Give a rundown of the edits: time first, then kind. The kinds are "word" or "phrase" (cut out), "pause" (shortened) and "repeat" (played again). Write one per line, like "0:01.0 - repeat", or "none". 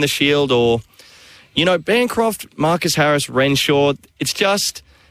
none